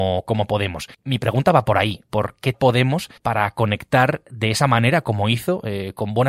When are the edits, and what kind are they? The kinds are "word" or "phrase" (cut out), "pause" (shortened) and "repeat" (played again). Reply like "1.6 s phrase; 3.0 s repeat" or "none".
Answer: 0.9 s pause; 2.5 s word; 3.2 s pause